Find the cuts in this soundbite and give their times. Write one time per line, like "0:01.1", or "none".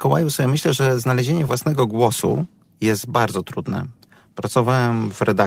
none